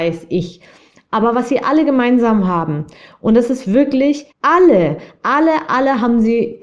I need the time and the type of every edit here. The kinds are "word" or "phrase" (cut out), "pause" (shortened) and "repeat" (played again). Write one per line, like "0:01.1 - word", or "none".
0:04.3 - pause